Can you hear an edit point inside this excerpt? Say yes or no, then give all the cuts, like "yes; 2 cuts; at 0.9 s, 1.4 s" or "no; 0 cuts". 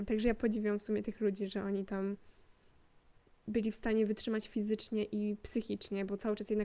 no; 0 cuts